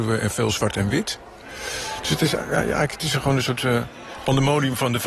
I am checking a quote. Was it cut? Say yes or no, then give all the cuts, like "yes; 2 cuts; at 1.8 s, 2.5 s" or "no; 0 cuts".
no; 0 cuts